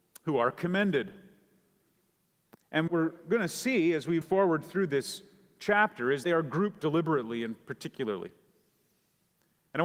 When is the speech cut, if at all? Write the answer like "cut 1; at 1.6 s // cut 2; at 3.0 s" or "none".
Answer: cut 1; at 2.9 s // cut 2; at 4.2 s // cut 3; at 6.2 s // cut 4; at 6.8 s